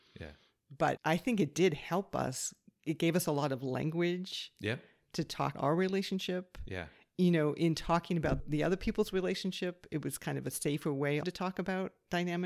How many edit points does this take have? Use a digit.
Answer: 4